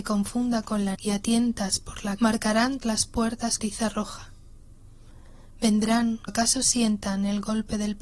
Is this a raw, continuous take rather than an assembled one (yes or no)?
no